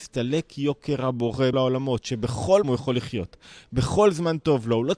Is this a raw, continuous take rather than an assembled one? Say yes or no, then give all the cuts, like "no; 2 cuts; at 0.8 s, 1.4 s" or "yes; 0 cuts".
no; 2 cuts; at 1.5 s, 2.6 s